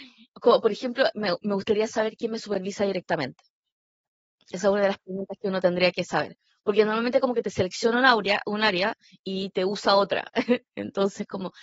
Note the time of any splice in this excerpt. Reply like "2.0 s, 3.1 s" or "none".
none